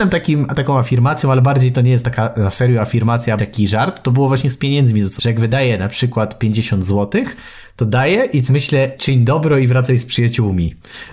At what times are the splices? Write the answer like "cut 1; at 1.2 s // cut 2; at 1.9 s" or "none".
cut 1; at 3.4 s // cut 2; at 5.2 s // cut 3; at 8.5 s // cut 4; at 9.0 s